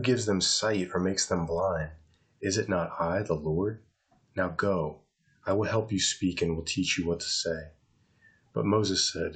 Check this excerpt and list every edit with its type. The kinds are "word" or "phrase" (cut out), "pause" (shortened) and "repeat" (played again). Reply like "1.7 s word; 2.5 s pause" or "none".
none